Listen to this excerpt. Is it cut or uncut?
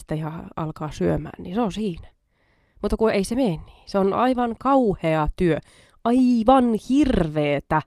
uncut